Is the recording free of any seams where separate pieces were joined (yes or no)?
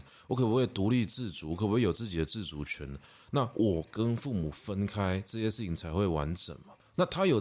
yes